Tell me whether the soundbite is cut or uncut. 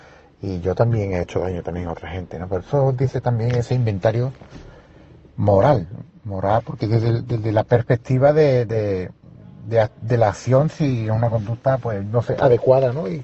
uncut